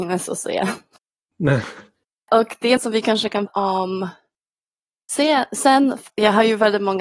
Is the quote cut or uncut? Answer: cut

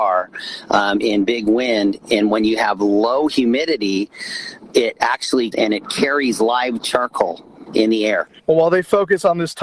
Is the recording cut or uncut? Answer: cut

